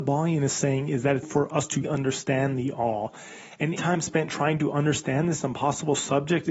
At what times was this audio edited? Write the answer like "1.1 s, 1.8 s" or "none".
1.2 s, 1.8 s, 3.8 s